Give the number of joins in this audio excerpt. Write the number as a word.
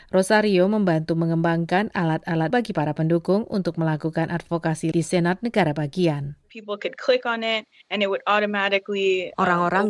two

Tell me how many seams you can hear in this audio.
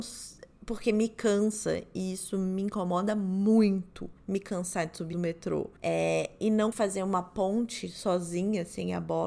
four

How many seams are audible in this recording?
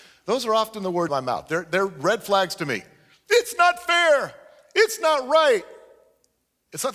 one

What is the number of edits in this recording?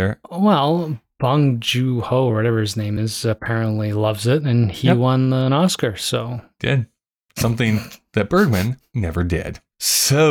zero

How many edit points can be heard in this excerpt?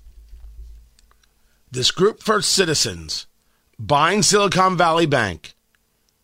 zero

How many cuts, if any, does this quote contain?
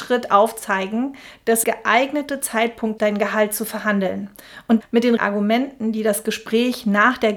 four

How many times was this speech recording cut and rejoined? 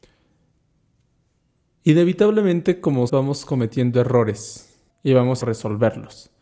three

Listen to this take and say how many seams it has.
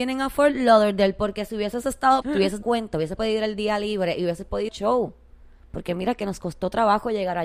four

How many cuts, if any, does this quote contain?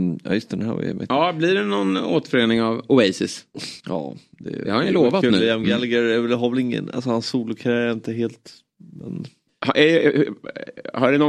two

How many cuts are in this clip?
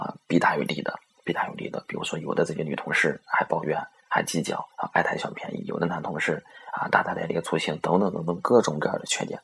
one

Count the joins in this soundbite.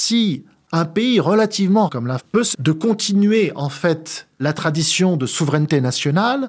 three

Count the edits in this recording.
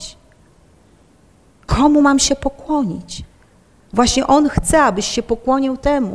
zero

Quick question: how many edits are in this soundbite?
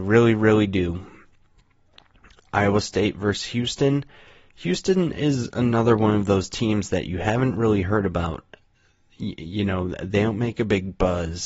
zero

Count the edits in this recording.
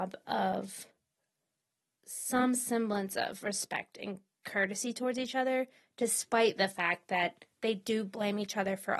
zero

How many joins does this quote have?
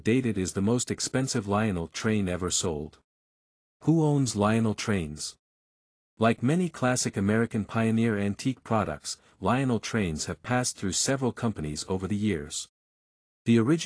zero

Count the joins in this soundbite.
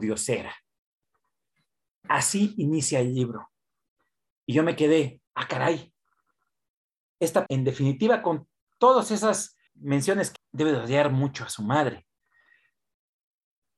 four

